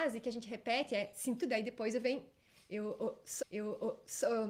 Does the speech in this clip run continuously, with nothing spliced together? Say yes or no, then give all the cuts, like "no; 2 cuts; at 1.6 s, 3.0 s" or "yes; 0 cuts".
no; 2 cuts; at 1.4 s, 3.4 s